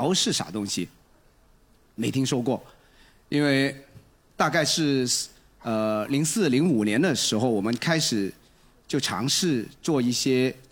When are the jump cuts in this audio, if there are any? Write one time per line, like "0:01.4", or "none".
none